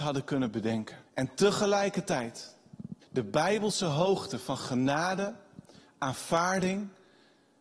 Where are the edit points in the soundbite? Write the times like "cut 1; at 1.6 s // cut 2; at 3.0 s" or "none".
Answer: cut 1; at 1.1 s // cut 2; at 3.0 s